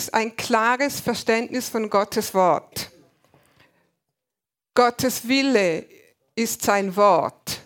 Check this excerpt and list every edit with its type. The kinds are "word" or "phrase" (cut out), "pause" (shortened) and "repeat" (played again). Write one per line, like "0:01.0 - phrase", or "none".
none